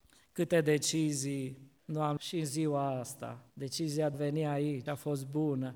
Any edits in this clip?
yes; 5 cuts; at 1.8 s, 2.2 s, 3.5 s, 4.1 s, 4.9 s

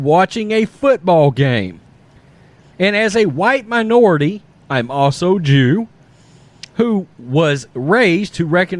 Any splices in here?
no; 0 cuts

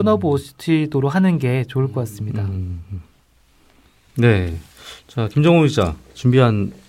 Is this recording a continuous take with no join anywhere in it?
yes; 0 cuts

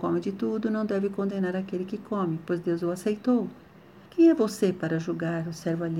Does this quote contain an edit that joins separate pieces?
yes; 1 cut; at 4.1 s

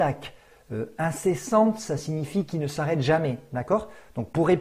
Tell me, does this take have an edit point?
no; 0 cuts

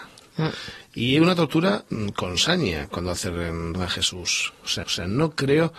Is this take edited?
yes; 2 cuts; at 3.7 s, 4.8 s

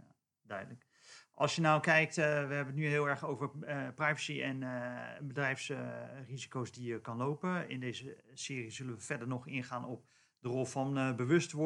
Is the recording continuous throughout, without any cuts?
yes; 0 cuts

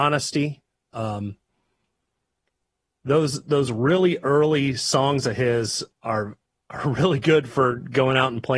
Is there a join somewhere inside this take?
no; 0 cuts

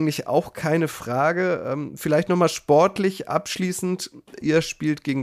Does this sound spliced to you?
no; 0 cuts

